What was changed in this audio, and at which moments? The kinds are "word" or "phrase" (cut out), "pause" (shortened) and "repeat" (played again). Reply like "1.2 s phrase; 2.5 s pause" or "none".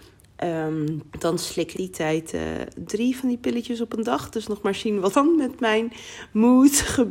1.1 s pause; 1.7 s phrase; 5.1 s word